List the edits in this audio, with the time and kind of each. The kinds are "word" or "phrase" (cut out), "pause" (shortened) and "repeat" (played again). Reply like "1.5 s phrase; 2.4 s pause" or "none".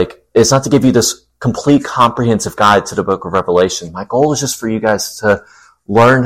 none